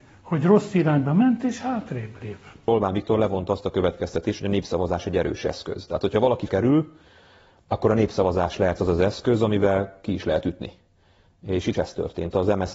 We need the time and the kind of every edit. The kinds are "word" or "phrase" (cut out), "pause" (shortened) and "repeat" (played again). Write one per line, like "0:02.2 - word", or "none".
0:06.5 - word
0:11.7 - word